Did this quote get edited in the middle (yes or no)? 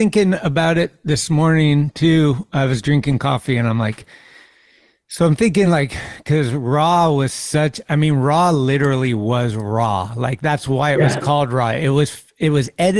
no